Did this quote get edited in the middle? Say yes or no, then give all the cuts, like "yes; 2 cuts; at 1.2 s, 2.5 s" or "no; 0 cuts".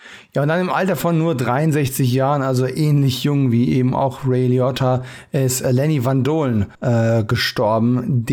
yes; 1 cut; at 6.7 s